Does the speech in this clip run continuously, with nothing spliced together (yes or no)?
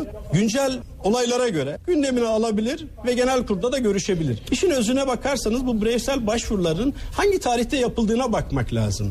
yes